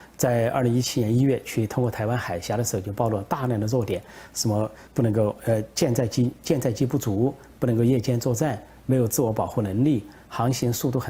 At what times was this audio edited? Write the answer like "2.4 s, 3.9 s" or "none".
4.9 s